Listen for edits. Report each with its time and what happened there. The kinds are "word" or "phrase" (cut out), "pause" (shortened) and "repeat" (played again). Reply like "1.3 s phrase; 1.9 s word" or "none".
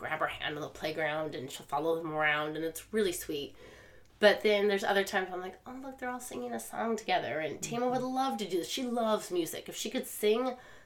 none

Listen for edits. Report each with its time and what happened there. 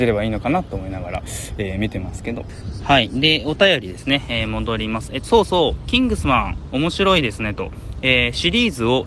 5.2 s word

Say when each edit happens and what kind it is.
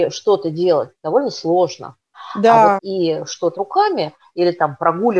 2.8 s phrase; 3.5 s word

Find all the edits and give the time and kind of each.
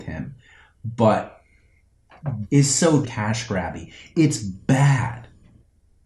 2.4 s word; 3.0 s word

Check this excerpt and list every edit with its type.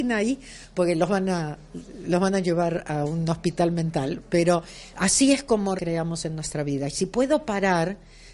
5.8 s word

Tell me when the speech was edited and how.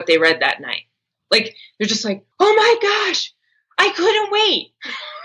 2.3 s pause

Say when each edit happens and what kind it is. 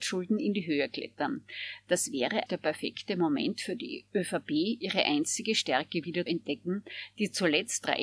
2.5 s word; 6.3 s word

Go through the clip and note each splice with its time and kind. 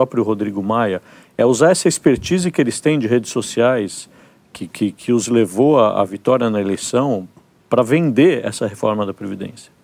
none

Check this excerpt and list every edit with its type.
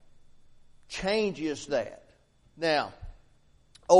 1.7 s word

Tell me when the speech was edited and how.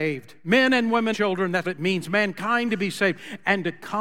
1.1 s word; 1.6 s word

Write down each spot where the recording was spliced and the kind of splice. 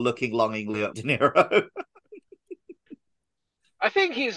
0.9 s word

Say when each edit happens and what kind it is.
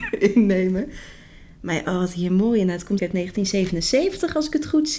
3.0 s word

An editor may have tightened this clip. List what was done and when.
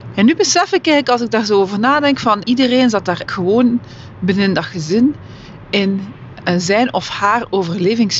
2.4 s word; 3.3 s word

